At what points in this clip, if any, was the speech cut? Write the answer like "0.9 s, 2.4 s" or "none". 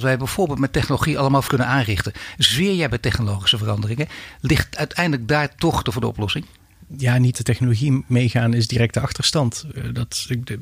1.5 s, 5.8 s, 7.3 s